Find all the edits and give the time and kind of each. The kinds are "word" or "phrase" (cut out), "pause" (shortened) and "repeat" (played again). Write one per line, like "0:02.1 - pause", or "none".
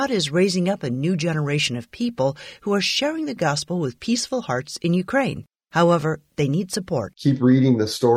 none